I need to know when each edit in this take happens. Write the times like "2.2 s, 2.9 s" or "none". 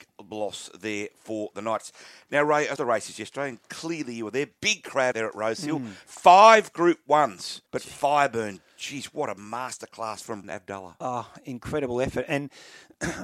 2.8 s, 5.1 s, 7.7 s, 10.4 s